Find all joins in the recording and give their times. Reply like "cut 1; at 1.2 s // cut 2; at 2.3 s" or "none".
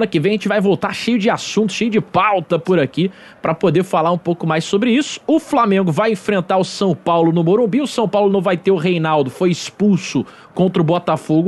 none